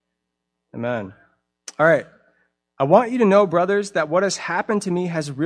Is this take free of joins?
yes; 0 cuts

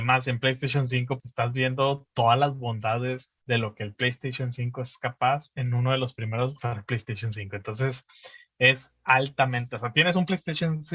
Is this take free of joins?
no; 3 cuts; at 1.2 s, 3.4 s, 6.6 s

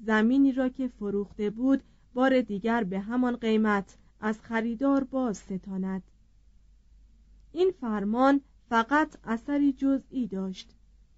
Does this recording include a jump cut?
no; 0 cuts

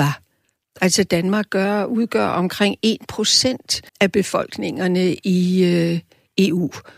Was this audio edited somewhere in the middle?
yes; 1 cut; at 3.9 s

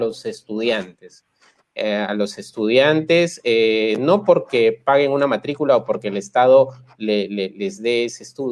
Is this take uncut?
yes; 0 cuts

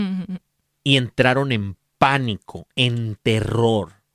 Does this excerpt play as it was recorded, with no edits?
yes; 0 cuts

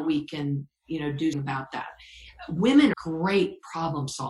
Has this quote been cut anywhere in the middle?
yes; 2 cuts; at 1.3 s, 2.9 s

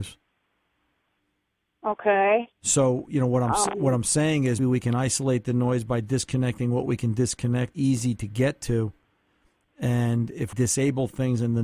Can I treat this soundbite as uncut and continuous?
no; 3 cuts; at 4.6 s, 7.7 s, 10.5 s

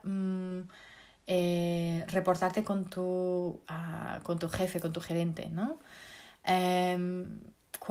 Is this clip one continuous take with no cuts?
yes; 0 cuts

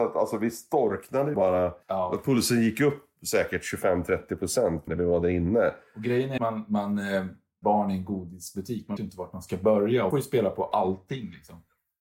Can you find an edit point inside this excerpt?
yes; 7 cuts; at 1.3 s, 1.8 s, 4.9 s, 6.4 s, 7.6 s, 9.0 s, 10.1 s

